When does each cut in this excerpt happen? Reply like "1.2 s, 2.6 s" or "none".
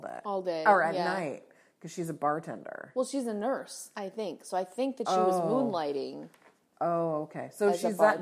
none